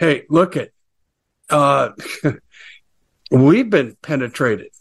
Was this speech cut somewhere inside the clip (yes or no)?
no